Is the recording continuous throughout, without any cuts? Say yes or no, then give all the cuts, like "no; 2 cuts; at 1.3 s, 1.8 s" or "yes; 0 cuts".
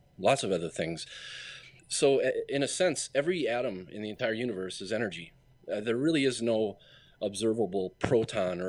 yes; 0 cuts